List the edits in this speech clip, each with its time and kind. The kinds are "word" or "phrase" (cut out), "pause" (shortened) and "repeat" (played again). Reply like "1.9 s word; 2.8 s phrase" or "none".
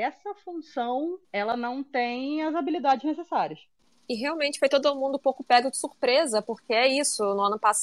1.2 s pause; 3.8 s pause

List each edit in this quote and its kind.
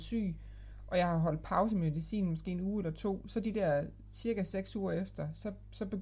none

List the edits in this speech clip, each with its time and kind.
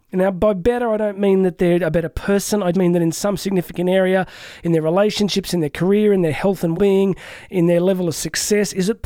2.7 s word; 6.7 s word

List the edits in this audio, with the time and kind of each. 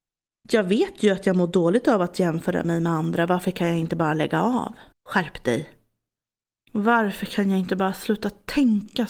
4.9 s pause

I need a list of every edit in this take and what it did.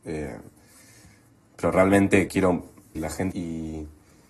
2.3 s word; 3.0 s word; 3.3 s phrase

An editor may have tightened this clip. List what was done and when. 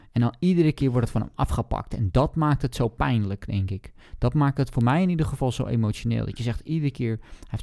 none

